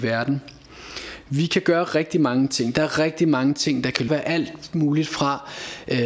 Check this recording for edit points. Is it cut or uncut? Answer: cut